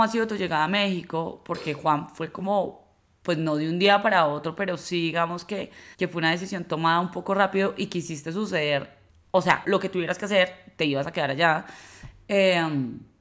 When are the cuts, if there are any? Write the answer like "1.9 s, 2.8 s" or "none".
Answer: 5.9 s, 9.1 s, 9.6 s